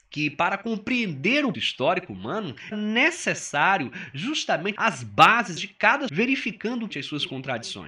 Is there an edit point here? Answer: yes; 6 cuts; at 1.5 s, 2.7 s, 4.8 s, 5.6 s, 6.1 s, 6.9 s

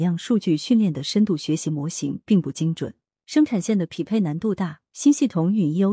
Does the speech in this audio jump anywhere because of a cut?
no; 0 cuts

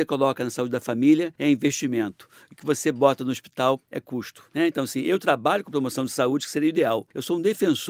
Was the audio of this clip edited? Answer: yes; 1 cut; at 4.5 s

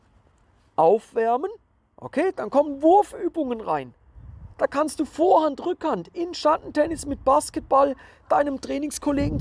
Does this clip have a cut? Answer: no; 0 cuts

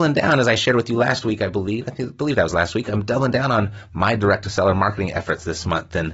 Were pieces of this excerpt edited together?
no; 0 cuts

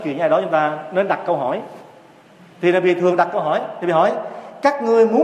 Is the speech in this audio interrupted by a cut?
no; 0 cuts

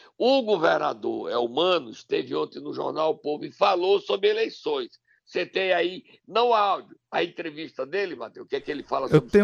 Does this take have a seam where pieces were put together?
no; 0 cuts

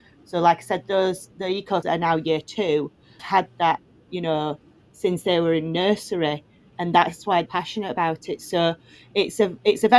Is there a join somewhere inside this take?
yes; 5 cuts; at 1.8 s, 3.2 s, 4.1 s, 6.8 s, 7.5 s

